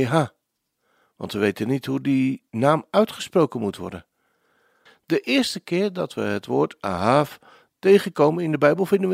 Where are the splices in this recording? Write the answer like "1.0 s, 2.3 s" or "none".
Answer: 2.5 s